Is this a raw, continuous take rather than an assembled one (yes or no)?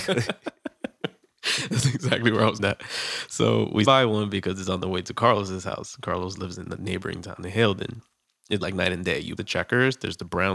no